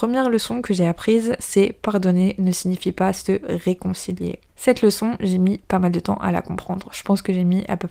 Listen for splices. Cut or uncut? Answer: uncut